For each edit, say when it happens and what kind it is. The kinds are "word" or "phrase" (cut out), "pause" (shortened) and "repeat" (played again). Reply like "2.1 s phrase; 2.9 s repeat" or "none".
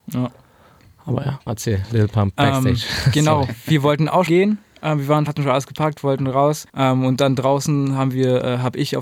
1.5 s word; 4.3 s word; 5.3 s word; 6.7 s pause